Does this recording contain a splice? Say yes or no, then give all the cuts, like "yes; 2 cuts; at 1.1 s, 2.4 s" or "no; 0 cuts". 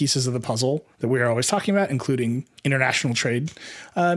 yes; 2 cuts; at 0.9 s, 2.6 s